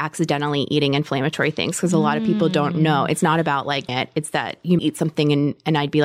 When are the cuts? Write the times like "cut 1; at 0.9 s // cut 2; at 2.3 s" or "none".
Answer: cut 1; at 3.9 s // cut 2; at 4.8 s